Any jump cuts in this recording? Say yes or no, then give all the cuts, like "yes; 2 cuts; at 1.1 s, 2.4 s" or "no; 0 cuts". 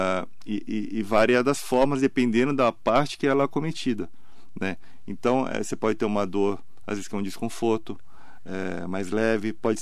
no; 0 cuts